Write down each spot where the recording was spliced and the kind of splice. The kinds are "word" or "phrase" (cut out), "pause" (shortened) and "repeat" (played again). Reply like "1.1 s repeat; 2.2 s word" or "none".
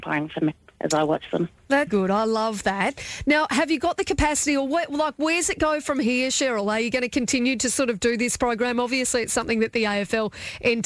1.9 s word